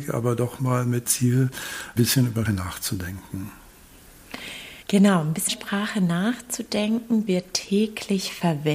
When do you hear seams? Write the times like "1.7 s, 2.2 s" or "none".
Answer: 1.0 s, 2.0 s, 2.4 s, 4.8 s, 5.5 s, 7.3 s